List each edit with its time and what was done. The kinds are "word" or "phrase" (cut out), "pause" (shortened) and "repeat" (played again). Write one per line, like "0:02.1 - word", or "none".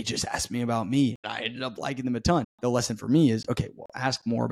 0:01.2 - word
0:02.4 - word